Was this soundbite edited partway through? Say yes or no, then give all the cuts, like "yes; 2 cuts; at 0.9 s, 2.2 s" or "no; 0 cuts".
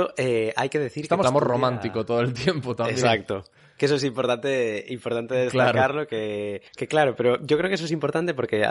yes; 2 cuts; at 1.2 s, 6.7 s